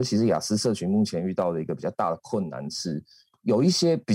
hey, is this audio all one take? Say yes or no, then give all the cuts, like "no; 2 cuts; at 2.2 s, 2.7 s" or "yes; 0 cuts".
yes; 0 cuts